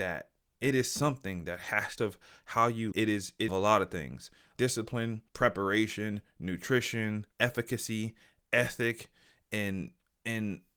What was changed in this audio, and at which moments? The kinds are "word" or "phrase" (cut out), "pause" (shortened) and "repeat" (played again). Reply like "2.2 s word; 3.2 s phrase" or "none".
2.0 s phrase; 2.9 s word; 3.5 s phrase; 4.6 s word; 5.3 s pause; 7.3 s pause